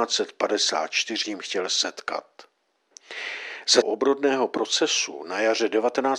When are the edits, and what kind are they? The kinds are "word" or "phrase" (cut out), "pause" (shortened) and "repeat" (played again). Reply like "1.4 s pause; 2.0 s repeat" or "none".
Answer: 1.2 s word; 3.8 s word